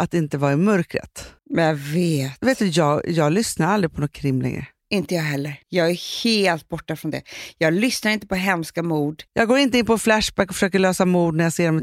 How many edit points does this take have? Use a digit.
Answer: 3